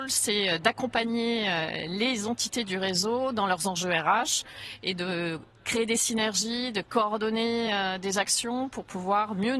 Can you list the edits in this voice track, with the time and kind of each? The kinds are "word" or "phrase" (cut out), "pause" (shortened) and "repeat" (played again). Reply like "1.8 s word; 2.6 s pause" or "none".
none